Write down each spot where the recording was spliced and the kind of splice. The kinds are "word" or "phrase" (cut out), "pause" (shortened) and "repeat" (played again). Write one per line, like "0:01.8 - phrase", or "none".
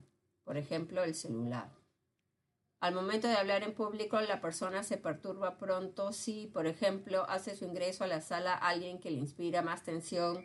none